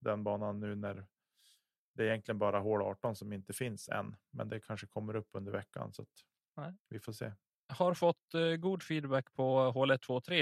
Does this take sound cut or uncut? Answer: uncut